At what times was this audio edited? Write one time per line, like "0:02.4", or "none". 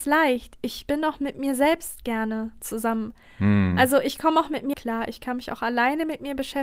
0:04.7